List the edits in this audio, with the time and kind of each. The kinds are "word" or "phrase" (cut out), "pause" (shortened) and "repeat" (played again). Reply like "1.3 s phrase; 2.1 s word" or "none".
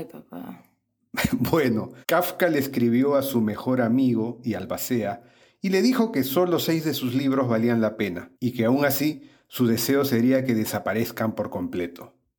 2.0 s pause; 8.3 s pause